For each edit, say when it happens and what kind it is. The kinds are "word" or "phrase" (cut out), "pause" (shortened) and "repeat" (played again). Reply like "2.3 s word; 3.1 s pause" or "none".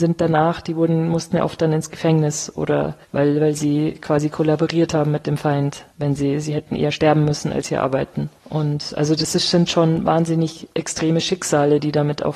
3.0 s pause; 5.9 s pause; 8.4 s pause; 10.7 s pause